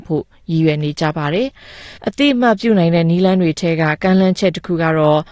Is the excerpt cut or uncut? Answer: cut